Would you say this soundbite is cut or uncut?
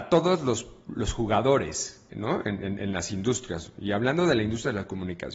cut